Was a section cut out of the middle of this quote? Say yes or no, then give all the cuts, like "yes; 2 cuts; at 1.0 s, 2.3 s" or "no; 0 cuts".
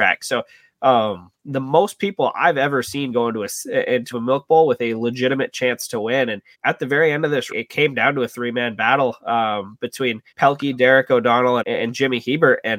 yes; 6 cuts; at 1.4 s, 4.1 s, 6.5 s, 7.5 s, 10.3 s, 11.6 s